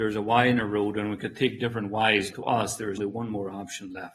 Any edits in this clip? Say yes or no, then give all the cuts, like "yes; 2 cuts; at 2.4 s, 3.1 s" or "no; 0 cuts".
yes; 2 cuts; at 2.3 s, 3.0 s